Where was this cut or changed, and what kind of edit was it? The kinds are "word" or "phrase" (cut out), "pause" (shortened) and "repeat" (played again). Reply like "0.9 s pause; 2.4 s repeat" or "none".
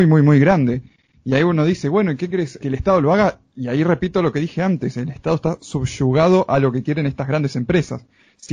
2.6 s word